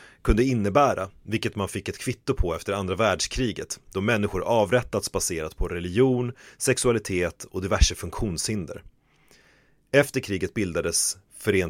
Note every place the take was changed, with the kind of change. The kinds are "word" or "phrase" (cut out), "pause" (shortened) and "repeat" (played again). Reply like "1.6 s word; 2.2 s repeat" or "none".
none